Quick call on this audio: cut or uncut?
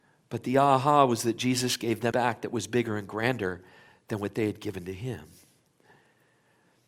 cut